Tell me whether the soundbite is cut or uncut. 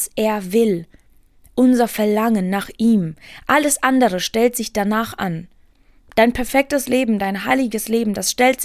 uncut